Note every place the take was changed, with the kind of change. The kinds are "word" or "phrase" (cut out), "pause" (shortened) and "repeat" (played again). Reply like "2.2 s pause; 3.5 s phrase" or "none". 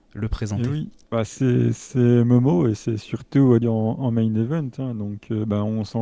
1.0 s pause; 3.6 s phrase

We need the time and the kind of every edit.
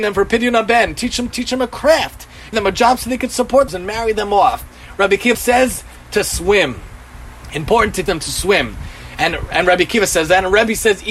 1.3 s word; 2.5 s word; 3.7 s word; 5.3 s word; 8.1 s word

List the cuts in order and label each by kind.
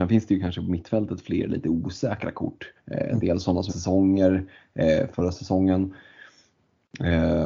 2.8 s pause; 3.7 s phrase; 5.1 s word

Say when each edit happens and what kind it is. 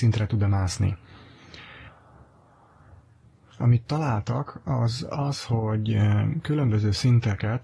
none

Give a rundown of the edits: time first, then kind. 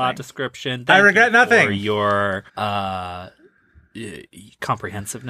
2.5 s pause

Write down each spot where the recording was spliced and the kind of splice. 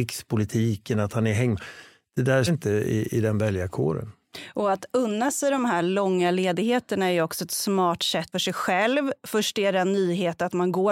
2.5 s word; 8.3 s phrase

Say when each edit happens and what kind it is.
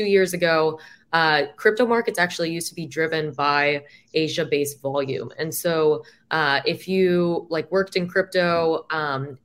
none

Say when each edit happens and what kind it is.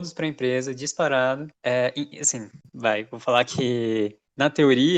none

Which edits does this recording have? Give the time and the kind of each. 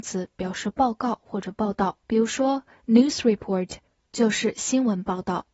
2.0 s pause

